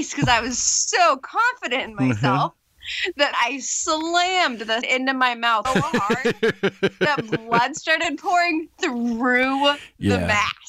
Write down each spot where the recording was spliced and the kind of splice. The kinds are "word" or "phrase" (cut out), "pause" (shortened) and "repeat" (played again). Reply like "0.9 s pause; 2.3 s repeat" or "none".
3.3 s word; 4.8 s word; 5.6 s word